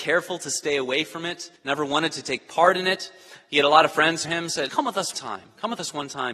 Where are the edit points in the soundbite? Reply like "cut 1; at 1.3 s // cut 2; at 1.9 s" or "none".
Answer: cut 1; at 1.6 s // cut 2; at 4.2 s // cut 3; at 4.7 s // cut 4; at 5.1 s